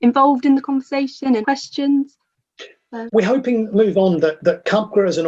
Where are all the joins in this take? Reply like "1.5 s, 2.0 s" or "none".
1.4 s, 3.1 s